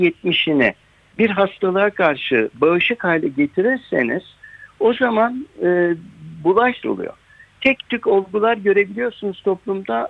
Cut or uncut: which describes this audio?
cut